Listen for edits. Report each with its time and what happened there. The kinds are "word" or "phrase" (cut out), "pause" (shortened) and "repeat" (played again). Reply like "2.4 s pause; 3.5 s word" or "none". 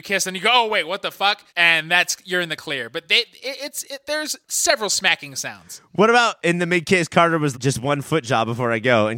1.5 s pause; 4.4 s pause; 7.5 s word